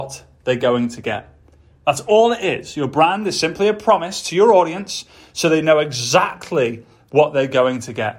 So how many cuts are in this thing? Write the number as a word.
zero